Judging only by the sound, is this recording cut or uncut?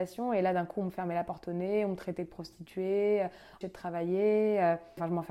cut